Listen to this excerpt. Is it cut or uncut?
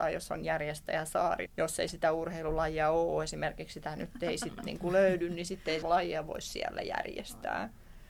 cut